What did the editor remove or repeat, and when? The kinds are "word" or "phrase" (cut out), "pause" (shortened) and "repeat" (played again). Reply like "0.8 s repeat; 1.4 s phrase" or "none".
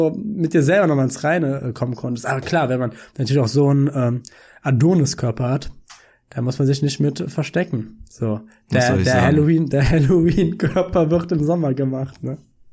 none